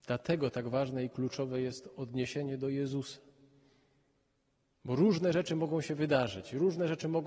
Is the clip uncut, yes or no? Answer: yes